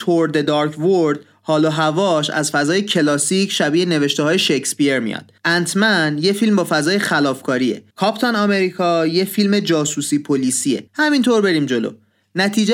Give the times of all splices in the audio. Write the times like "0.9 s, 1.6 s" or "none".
5.4 s, 7.9 s, 10.9 s